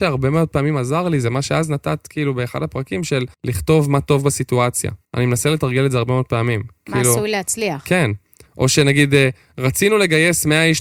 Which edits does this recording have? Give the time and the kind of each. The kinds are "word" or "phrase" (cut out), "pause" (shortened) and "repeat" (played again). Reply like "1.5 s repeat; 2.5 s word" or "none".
3.3 s pause; 5.0 s pause